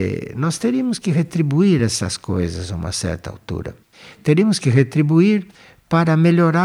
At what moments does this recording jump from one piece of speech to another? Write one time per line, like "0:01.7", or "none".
none